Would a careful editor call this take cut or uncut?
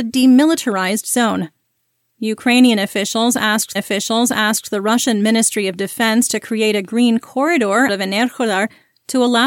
cut